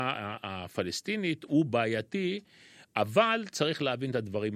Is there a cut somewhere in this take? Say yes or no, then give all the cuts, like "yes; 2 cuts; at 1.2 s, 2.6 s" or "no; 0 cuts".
no; 0 cuts